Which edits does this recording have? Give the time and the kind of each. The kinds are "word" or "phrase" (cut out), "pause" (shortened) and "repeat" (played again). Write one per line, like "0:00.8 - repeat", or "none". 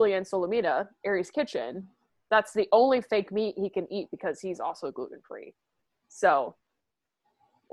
none